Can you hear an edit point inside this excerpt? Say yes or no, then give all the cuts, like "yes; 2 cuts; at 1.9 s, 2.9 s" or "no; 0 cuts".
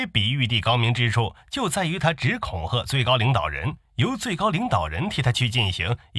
yes; 1 cut; at 3.8 s